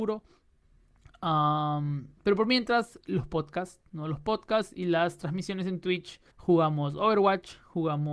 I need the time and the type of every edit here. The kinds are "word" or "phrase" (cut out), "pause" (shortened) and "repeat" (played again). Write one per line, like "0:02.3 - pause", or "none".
0:06.3 - pause